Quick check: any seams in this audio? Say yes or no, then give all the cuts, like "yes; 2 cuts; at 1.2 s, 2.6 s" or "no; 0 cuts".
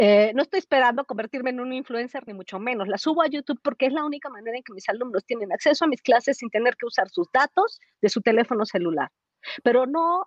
no; 0 cuts